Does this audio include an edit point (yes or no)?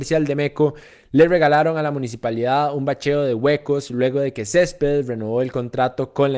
no